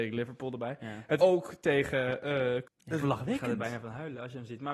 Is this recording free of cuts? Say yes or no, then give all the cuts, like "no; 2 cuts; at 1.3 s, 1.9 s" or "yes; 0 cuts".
no; 3 cuts; at 1.2 s, 2.6 s, 3.0 s